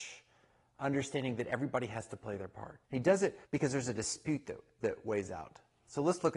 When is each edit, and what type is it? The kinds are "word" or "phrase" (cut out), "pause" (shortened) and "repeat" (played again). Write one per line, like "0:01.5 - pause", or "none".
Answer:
0:02.8 - pause
0:03.4 - pause